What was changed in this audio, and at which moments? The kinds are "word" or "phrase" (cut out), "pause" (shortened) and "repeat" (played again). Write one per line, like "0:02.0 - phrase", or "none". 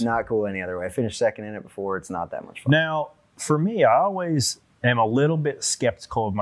0:04.7 - word